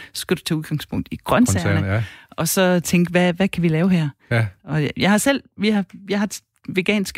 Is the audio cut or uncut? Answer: uncut